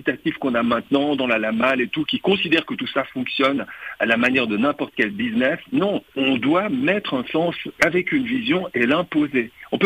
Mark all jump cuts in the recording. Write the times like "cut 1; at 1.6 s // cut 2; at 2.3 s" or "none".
cut 1; at 6.1 s